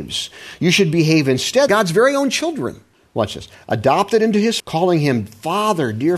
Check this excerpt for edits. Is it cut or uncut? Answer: cut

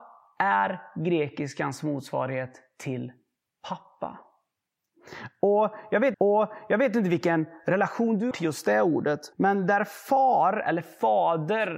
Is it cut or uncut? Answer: cut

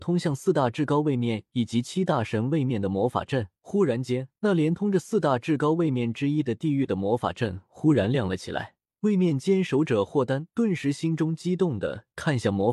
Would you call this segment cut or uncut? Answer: cut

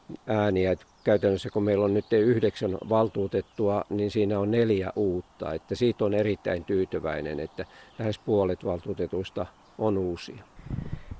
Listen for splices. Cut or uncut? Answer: uncut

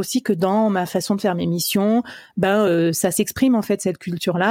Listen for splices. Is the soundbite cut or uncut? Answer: uncut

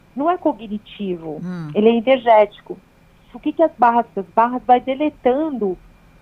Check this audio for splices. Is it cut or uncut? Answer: cut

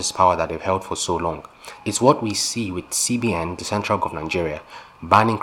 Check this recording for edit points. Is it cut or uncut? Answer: cut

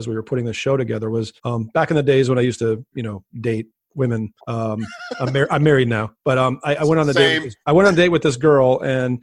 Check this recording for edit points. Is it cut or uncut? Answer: cut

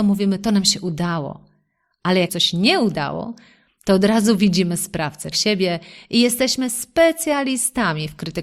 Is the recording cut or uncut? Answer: cut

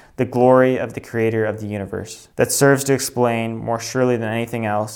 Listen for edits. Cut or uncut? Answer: cut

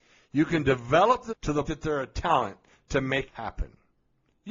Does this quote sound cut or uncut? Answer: cut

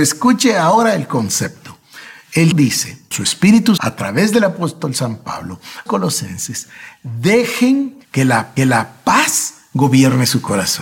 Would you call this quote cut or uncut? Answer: cut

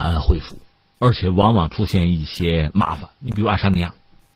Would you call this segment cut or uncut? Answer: uncut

